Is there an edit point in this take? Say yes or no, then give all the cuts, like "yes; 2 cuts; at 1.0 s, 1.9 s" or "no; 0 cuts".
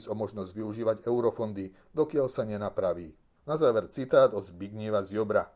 no; 0 cuts